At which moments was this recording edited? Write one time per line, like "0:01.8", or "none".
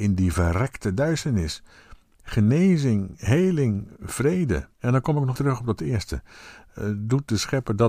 0:04.7
0:05.3